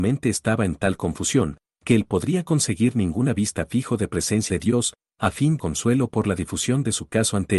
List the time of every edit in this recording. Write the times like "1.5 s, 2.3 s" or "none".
4.5 s, 5.6 s